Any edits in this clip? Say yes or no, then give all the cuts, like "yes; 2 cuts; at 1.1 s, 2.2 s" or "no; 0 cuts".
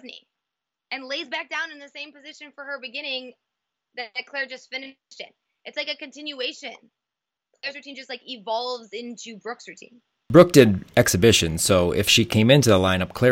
no; 0 cuts